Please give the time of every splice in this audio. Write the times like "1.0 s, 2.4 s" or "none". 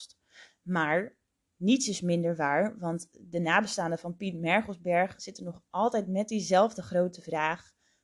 none